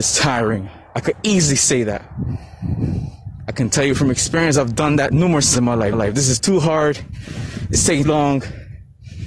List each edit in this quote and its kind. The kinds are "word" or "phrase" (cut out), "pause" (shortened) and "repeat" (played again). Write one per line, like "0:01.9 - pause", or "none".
0:05.5 - word
0:05.9 - repeat
0:08.0 - word